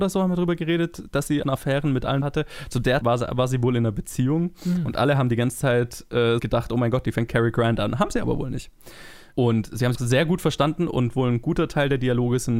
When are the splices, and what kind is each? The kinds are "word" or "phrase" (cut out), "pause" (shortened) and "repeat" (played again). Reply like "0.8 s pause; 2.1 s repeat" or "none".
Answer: 1.4 s phrase; 2.2 s phrase; 3.0 s word; 6.4 s word; 7.3 s phrase; 9.9 s word